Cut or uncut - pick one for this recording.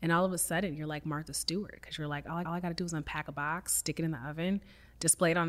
cut